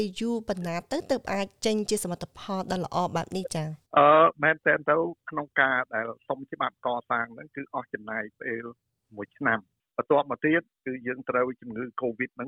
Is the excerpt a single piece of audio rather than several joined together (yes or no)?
no